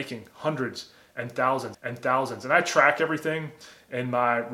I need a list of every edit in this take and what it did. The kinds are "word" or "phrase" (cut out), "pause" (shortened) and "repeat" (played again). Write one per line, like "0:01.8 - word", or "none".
0:01.7 - repeat